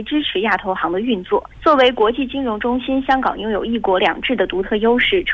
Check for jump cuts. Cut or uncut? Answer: cut